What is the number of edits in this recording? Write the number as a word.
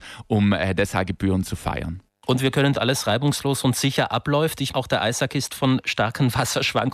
two